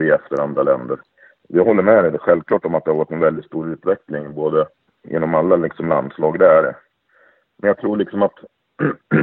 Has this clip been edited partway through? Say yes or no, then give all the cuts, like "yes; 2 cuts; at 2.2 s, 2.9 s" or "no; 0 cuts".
no; 0 cuts